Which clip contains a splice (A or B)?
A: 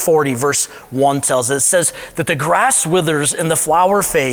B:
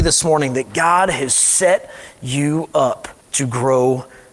B